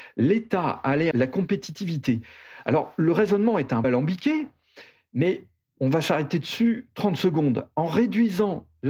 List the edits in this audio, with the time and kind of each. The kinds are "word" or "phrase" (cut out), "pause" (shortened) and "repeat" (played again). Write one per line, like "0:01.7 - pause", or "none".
0:01.1 - word
0:03.8 - word